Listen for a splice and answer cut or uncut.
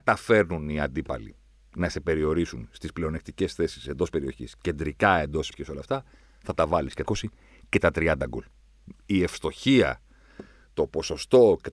cut